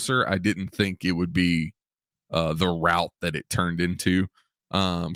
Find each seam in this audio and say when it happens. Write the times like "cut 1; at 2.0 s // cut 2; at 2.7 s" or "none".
none